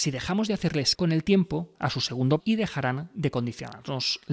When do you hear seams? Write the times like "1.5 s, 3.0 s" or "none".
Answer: 0.9 s, 1.7 s, 2.4 s